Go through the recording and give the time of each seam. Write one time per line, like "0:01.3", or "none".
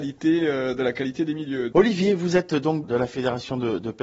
0:02.8